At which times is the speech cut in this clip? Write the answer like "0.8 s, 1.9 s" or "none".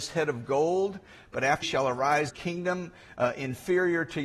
1.6 s, 2.3 s